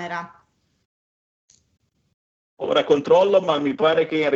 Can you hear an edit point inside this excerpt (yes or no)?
no